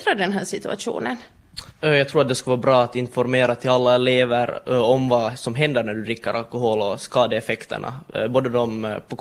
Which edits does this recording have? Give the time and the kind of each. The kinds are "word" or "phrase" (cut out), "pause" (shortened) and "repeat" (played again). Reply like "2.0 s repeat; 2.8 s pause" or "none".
1.7 s pause